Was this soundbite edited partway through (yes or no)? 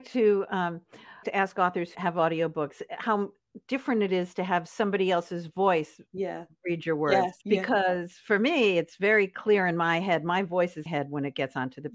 yes